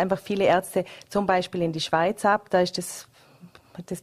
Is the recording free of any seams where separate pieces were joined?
yes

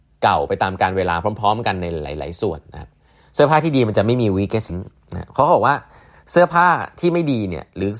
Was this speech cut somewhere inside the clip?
yes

